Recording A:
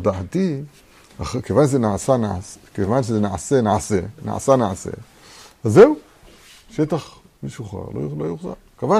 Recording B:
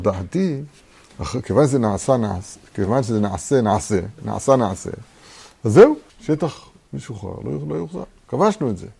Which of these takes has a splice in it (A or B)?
B